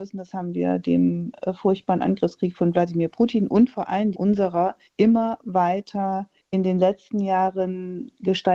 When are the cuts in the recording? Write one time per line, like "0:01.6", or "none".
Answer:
0:04.1
0:04.9
0:06.4